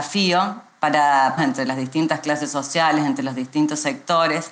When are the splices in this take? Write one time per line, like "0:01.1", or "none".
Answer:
0:01.4